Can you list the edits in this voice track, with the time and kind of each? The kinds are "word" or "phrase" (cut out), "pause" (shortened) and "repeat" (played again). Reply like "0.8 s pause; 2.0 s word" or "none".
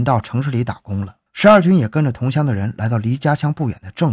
1.3 s pause